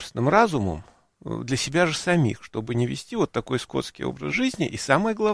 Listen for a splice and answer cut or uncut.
uncut